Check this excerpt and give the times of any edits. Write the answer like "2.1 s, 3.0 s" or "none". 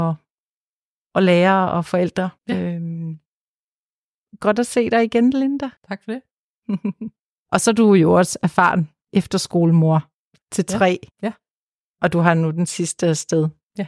2.4 s, 5.8 s, 11.1 s, 11.8 s